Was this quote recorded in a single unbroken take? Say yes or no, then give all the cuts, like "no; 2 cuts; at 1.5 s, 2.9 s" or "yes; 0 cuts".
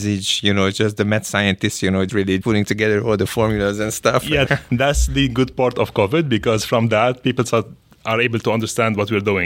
no; 3 cuts; at 2.1 s, 2.4 s, 4.5 s